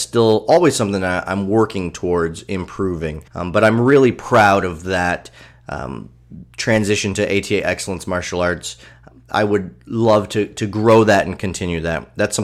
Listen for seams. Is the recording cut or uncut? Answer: cut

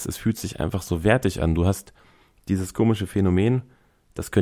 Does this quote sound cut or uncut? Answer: uncut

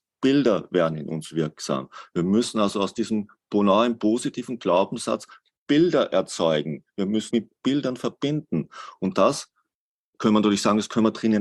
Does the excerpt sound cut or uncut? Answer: cut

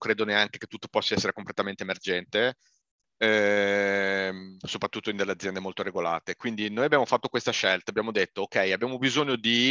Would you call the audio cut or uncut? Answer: cut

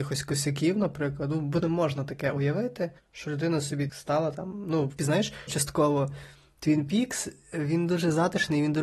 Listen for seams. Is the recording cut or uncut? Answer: cut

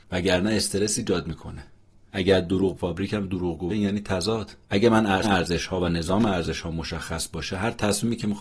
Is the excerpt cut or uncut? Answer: cut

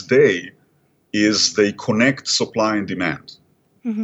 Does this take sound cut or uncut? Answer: uncut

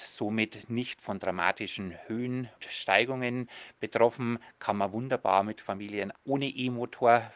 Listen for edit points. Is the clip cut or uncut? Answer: cut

